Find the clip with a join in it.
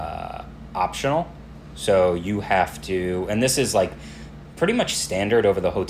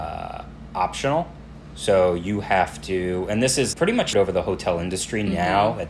second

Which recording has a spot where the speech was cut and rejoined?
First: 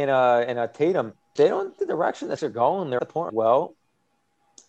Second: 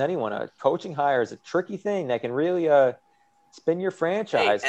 first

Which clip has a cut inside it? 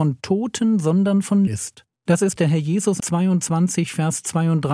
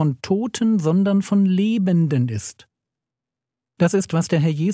first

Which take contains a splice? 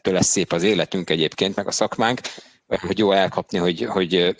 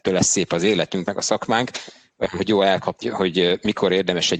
second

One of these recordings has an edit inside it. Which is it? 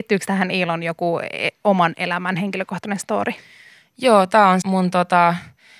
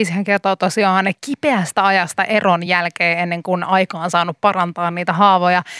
first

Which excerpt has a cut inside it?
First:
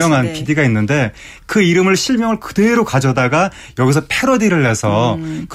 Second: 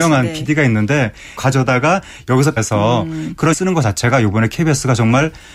second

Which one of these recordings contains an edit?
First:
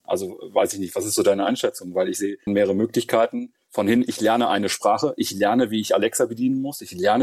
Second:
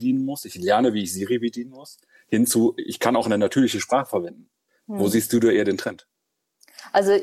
first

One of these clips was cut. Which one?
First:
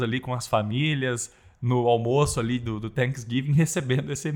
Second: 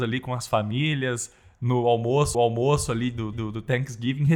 second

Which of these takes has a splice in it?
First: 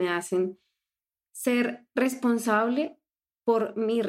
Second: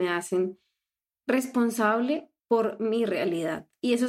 second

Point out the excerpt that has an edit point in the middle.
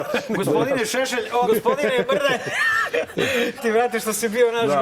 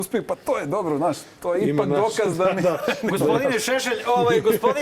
first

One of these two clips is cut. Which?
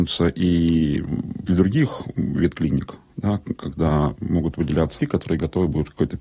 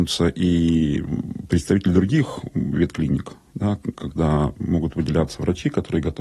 first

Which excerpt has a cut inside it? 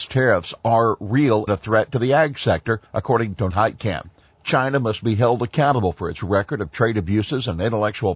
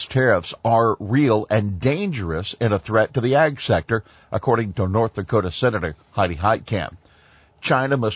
first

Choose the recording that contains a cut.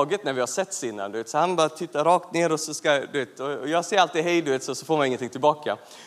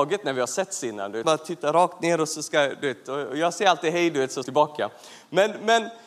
second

